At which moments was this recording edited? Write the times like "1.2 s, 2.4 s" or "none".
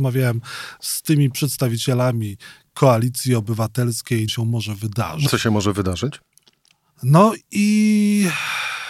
4.3 s, 5.3 s